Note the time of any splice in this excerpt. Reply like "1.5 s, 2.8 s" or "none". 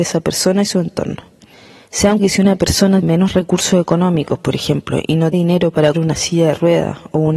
2.2 s, 3.0 s, 5.3 s, 5.9 s